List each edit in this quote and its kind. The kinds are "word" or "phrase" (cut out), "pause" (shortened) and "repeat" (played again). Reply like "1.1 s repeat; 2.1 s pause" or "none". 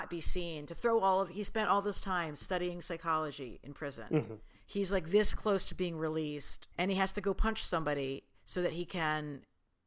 4.5 s pause; 6.7 s pause